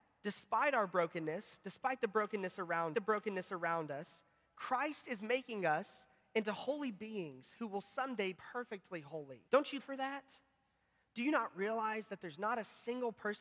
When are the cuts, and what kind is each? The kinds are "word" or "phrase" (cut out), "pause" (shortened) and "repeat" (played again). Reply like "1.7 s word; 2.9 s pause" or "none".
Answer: 2.9 s repeat; 8.3 s word; 9.5 s pause; 9.8 s word

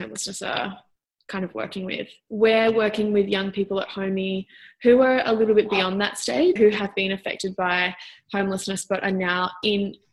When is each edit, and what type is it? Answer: 6.6 s word

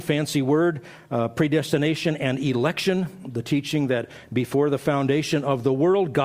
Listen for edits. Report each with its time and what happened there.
none

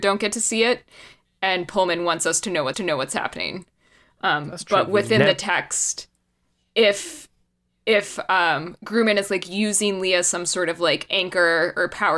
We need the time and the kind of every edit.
2.7 s repeat

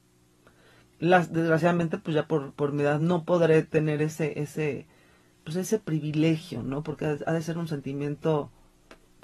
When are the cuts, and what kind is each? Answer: none

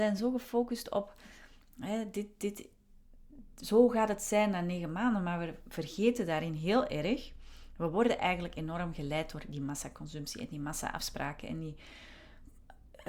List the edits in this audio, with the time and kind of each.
none

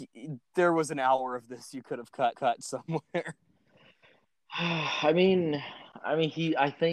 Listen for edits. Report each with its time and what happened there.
2.3 s repeat

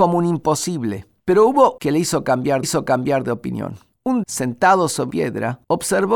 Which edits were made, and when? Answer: 1.8 s phrase; 2.6 s repeat; 4.2 s word; 5.1 s word

